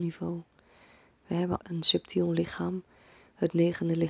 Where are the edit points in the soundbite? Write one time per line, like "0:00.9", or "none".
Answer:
0:01.6